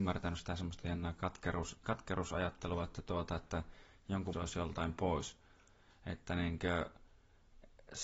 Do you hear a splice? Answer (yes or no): yes